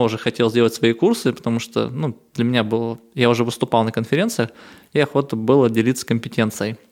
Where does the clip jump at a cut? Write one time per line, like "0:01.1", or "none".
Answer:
none